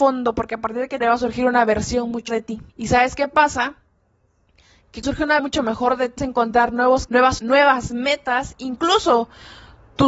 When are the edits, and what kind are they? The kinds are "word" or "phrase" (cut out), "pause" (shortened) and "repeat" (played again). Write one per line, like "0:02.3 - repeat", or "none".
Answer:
0:01.0 - phrase
0:02.3 - word
0:02.7 - pause
0:05.0 - word
0:05.4 - word
0:06.2 - word
0:07.1 - word
0:07.4 - word